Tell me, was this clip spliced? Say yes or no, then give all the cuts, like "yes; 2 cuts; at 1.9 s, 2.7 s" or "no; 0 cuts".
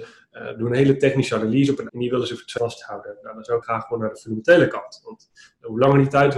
yes; 3 cuts; at 1.9 s, 2.6 s, 3.6 s